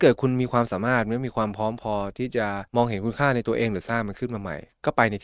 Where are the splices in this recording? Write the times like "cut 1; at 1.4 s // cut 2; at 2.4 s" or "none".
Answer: cut 1; at 2.7 s